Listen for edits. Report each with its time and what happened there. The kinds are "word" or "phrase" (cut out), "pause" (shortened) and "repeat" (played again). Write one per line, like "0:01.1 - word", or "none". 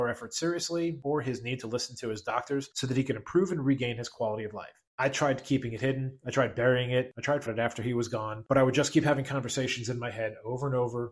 0:07.5 - phrase